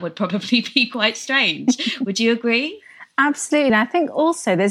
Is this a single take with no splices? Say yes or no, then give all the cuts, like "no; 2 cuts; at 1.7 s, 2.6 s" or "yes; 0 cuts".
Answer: yes; 0 cuts